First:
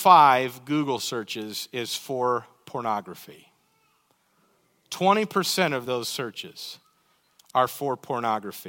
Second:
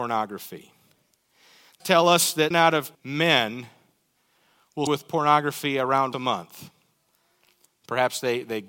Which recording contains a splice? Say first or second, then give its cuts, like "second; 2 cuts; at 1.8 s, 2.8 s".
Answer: second; 5 cuts; at 1.8 s, 2.5 s, 2.9 s, 4.9 s, 6.1 s